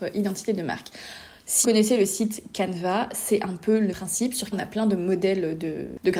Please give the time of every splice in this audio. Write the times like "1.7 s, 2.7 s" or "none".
1.6 s, 3.9 s, 4.5 s